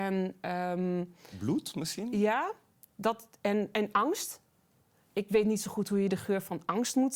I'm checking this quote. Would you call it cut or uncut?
uncut